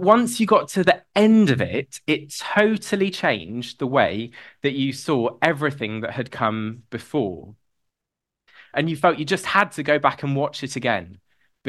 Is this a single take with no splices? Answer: yes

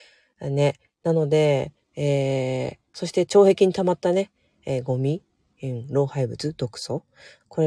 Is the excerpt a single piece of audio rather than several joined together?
yes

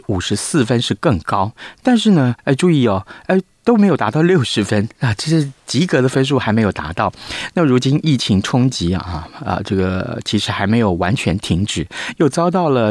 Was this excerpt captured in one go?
no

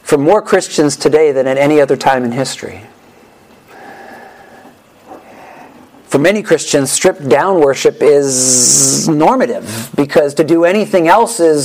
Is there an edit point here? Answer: no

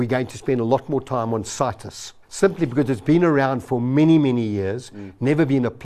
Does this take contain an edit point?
yes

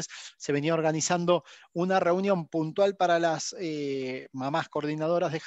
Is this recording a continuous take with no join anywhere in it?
yes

